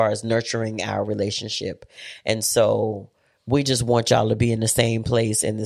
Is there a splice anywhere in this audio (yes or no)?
no